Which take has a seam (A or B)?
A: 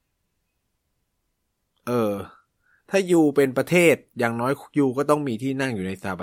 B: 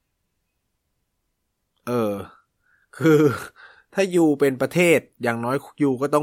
A